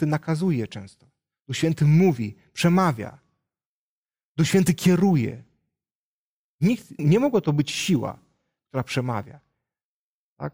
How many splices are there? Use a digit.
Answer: 1